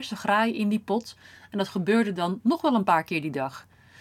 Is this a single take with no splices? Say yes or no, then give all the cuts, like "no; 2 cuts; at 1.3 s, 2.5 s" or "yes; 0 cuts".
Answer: yes; 0 cuts